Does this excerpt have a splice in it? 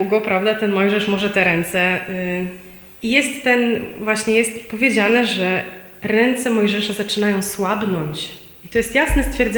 no; 0 cuts

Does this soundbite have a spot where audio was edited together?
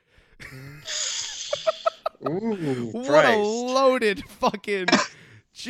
no; 0 cuts

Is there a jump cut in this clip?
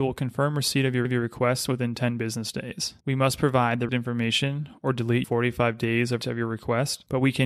yes; 5 cuts; at 1.0 s, 3.0 s, 3.9 s, 5.2 s, 6.2 s

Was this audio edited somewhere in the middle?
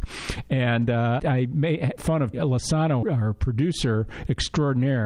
yes; 4 cuts; at 1.2 s, 2.0 s, 2.3 s, 3.0 s

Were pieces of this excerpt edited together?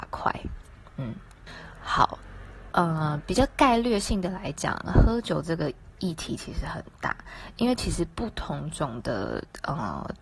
no; 0 cuts

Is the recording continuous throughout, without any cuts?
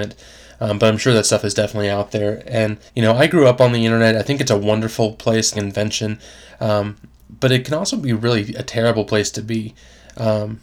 no; 2 cuts; at 2.9 s, 5.5 s

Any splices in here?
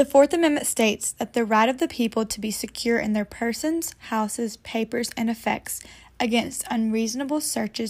no; 0 cuts

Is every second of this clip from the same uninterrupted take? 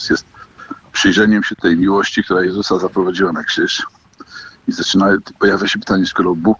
no; 1 cut; at 4.6 s

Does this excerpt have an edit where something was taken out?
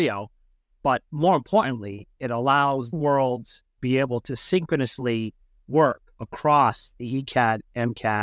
yes; 2 cuts; at 2.9 s, 3.8 s

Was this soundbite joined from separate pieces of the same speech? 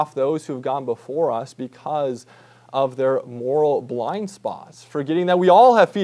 no; 0 cuts

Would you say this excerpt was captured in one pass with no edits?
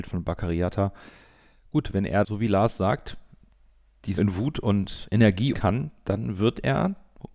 no; 3 cuts; at 2.2 s, 4.2 s, 5.5 s

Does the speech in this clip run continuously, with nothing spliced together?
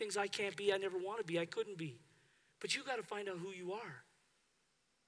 yes; 0 cuts

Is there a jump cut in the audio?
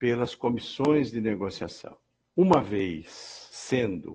no; 0 cuts

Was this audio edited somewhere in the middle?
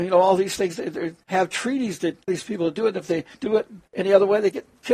yes; 4 cuts; at 1.2 s, 2.3 s, 3.3 s, 3.9 s

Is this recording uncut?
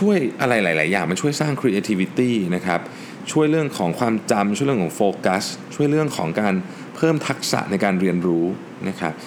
yes; 0 cuts

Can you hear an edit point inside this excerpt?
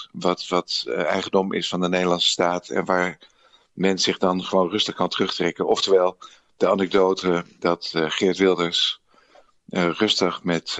no; 0 cuts

